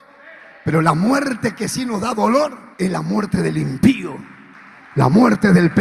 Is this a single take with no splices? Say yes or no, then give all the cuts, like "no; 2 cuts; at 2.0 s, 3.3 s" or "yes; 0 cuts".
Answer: no; 1 cut; at 2.7 s